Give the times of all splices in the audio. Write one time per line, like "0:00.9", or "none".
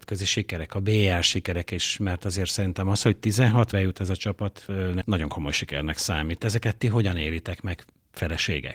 0:03.7
0:05.0

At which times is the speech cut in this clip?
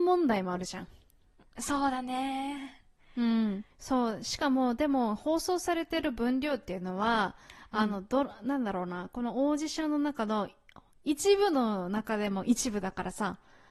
none

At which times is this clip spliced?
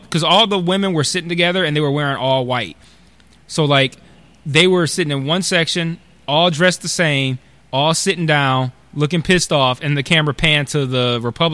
none

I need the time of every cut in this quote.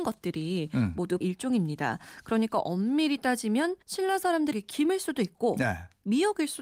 0:01.2
0:03.8
0:04.5

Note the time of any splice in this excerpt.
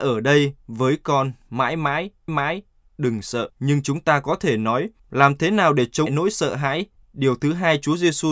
0:02.3
0:03.5
0:05.0
0:06.1
0:07.0

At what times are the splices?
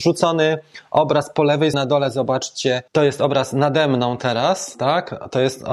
0:01.7
0:02.9

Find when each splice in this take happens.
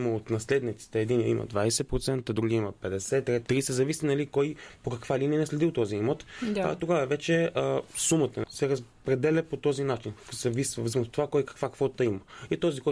0:03.5
0:08.4
0:10.9

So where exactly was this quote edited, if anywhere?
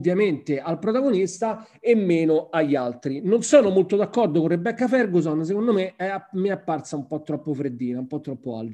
none

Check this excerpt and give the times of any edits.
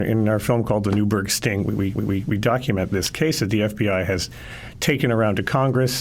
0:01.9

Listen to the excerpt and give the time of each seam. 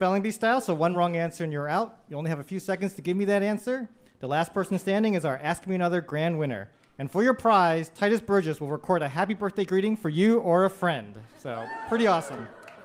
none

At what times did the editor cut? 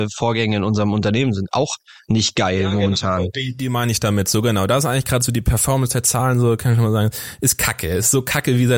none

